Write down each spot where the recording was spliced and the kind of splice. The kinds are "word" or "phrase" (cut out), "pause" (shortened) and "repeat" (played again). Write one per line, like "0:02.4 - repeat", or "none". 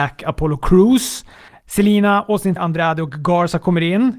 0:01.5 - pause
0:02.6 - word